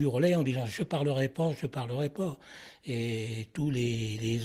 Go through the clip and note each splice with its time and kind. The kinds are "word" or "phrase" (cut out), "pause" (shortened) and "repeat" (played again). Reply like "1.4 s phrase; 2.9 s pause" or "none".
none

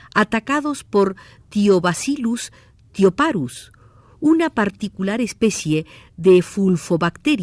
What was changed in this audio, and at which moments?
none

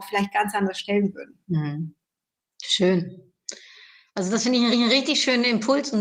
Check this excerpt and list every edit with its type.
1.4 s pause; 4.7 s repeat

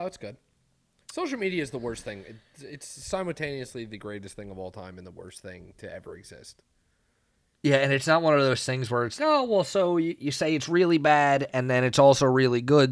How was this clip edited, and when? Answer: 9.2 s word

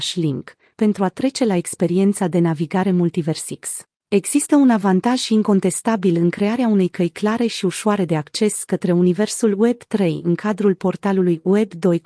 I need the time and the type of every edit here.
4.0 s pause

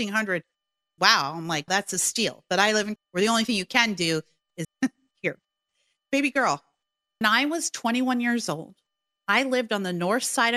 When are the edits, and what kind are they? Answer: 1.0 s word; 1.7 s word; 3.0 s word; 4.6 s word; 6.1 s word; 7.2 s word

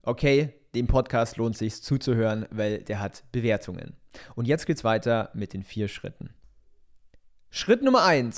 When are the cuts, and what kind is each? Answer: none

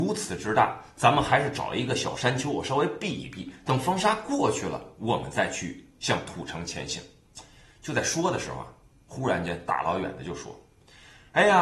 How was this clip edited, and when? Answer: none

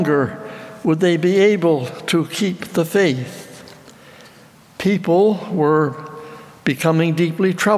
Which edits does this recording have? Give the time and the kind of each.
none

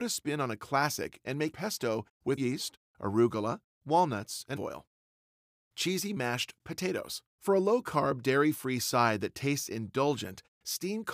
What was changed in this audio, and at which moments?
1.5 s word; 2.4 s word; 3.7 s word; 4.6 s word; 5.4 s pause; 7.3 s pause

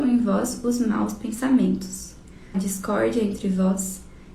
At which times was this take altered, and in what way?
2.5 s phrase

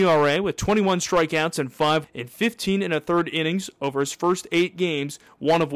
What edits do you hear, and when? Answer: 2.0 s word

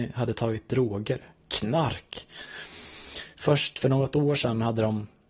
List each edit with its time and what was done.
none

